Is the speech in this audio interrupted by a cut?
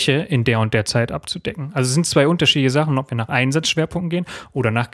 no; 0 cuts

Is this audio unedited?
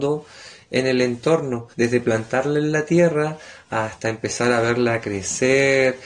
no; 1 cut; at 1.7 s

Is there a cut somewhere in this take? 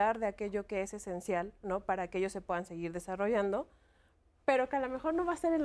no; 0 cuts

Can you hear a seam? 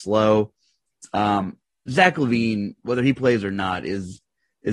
no; 0 cuts

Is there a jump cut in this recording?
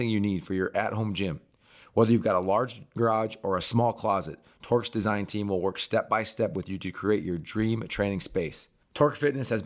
no; 0 cuts

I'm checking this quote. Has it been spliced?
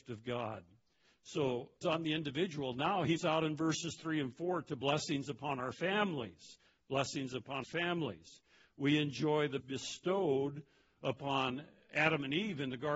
yes; 4 cuts; at 1.8 s, 3.2 s, 7.6 s, 9.6 s

